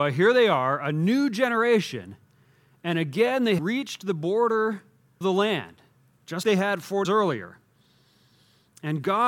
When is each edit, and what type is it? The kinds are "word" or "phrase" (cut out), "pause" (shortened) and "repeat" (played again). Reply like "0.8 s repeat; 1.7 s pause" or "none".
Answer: 3.6 s word; 5.2 s word; 6.4 s word; 7.0 s word